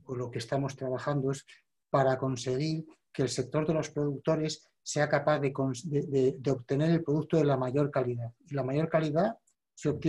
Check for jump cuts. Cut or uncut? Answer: uncut